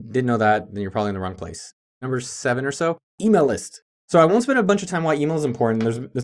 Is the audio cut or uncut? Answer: uncut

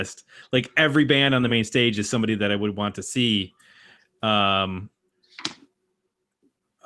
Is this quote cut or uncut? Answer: uncut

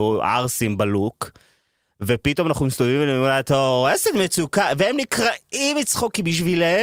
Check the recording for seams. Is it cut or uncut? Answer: uncut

